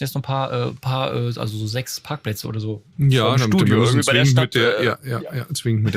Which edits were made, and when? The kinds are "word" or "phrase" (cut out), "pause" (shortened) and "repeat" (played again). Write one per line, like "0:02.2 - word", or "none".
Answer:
0:02.9 - pause